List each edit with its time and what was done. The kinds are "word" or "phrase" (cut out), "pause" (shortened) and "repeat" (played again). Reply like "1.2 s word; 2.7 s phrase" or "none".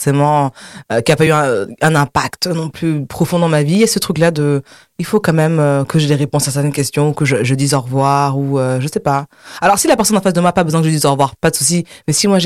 none

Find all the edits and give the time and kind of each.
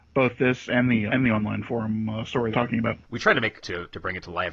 1.1 s word; 2.5 s phrase; 3.0 s pause; 3.6 s phrase

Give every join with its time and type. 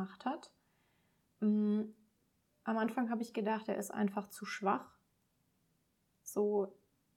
none

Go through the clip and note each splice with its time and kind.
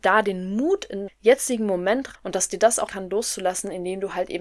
1.1 s word; 2.1 s word; 2.9 s word

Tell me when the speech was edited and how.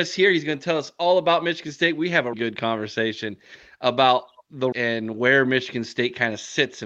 2.3 s word; 4.7 s word

